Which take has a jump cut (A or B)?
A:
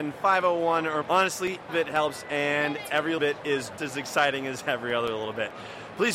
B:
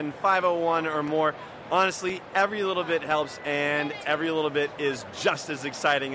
A